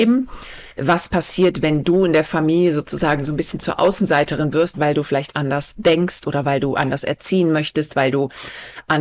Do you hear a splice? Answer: yes; 1 cut; at 4.7 s

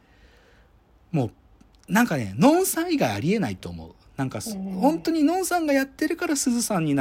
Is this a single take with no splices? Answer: yes; 0 cuts

